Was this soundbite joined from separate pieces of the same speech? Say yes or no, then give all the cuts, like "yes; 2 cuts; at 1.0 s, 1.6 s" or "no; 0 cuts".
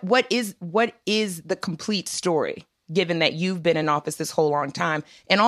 no; 0 cuts